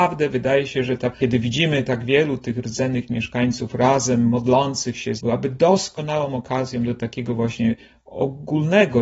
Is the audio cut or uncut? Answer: cut